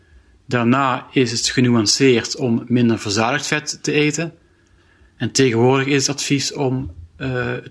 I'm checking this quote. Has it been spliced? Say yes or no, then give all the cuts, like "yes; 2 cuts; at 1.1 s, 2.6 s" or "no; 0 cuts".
no; 0 cuts